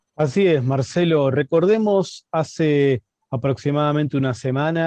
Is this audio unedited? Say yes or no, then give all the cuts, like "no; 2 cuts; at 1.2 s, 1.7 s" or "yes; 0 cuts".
yes; 0 cuts